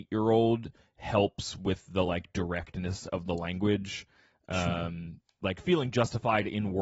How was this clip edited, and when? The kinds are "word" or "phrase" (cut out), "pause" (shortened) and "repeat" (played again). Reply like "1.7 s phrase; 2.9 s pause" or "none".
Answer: none